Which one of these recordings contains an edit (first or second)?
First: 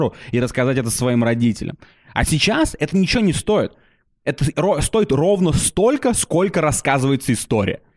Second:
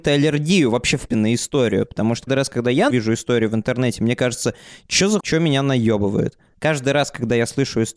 second